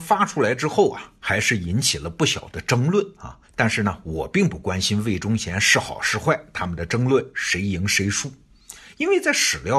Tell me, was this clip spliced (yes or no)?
yes